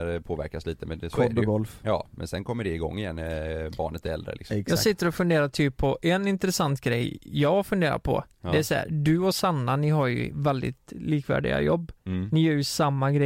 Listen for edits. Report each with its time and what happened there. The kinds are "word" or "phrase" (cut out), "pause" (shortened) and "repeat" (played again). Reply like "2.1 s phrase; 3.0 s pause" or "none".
none